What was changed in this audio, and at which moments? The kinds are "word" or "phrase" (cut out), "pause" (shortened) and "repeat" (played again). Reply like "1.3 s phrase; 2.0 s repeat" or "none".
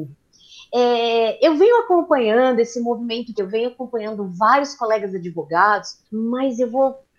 3.4 s word; 6.1 s pause